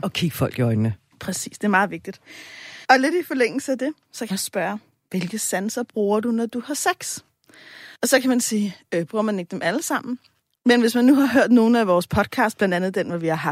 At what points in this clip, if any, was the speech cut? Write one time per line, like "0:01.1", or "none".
0:02.8
0:04.3
0:07.9